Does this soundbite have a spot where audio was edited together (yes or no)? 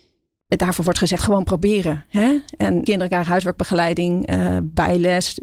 yes